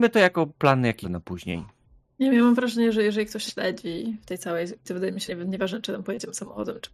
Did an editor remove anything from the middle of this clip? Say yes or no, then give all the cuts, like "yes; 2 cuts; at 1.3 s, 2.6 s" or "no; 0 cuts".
yes; 4 cuts; at 1.0 s, 3.5 s, 4.8 s, 5.3 s